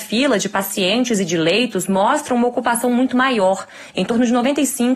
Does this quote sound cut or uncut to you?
uncut